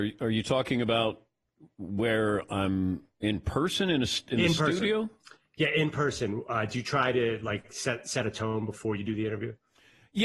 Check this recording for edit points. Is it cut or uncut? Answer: uncut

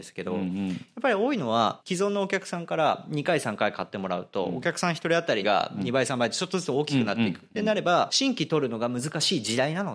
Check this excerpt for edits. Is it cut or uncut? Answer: cut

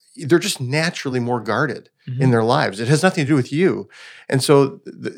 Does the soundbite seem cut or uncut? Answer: uncut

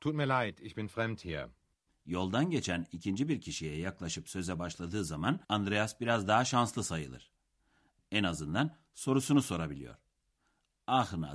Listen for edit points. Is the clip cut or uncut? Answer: cut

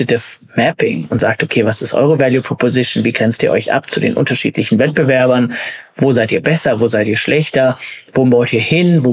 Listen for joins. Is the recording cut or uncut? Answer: uncut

